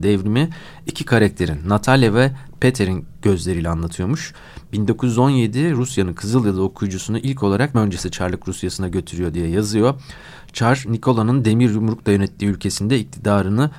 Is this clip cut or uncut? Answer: cut